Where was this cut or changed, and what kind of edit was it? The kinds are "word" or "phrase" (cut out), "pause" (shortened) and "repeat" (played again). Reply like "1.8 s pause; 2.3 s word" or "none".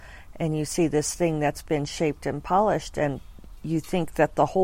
none